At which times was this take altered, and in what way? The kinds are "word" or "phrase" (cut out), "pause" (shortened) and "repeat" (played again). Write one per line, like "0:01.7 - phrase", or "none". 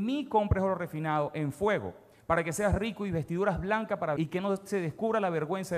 0:04.2 - word